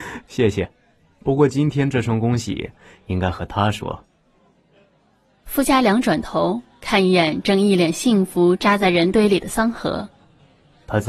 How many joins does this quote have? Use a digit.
0